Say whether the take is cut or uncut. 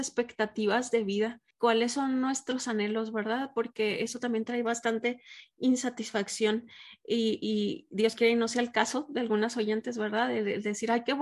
cut